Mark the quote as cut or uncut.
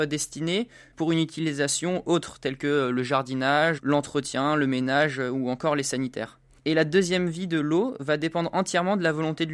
uncut